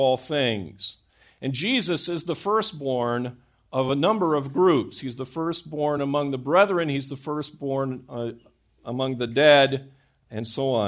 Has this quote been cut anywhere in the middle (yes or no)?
no